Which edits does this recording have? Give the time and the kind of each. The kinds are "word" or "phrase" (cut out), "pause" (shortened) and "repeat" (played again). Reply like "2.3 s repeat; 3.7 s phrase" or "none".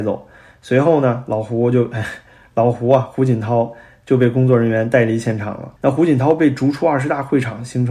5.8 s pause